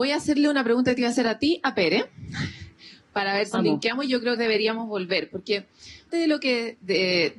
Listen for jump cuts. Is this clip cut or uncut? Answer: cut